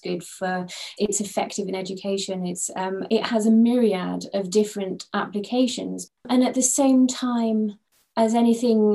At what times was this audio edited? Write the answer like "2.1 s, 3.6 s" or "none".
1.0 s